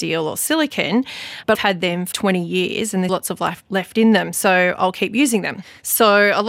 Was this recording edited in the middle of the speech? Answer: yes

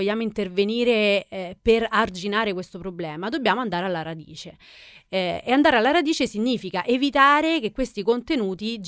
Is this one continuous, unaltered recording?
yes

